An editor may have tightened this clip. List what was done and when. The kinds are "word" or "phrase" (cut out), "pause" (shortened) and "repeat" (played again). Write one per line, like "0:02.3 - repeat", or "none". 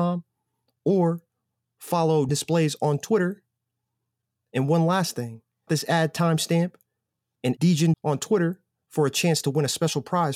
0:02.3 - word
0:05.7 - word
0:07.6 - word
0:07.9 - word